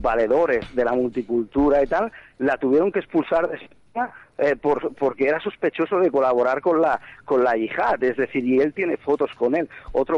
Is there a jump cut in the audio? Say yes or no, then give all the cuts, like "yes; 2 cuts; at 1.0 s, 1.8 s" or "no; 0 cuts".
no; 0 cuts